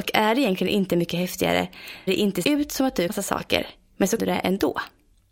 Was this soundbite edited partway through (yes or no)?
yes